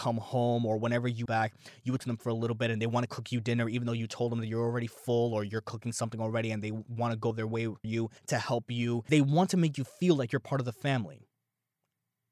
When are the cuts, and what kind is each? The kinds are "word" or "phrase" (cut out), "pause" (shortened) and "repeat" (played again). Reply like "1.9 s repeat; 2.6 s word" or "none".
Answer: 1.3 s phrase; 2.0 s word; 7.3 s word; 7.8 s word; 8.2 s pause; 9.1 s word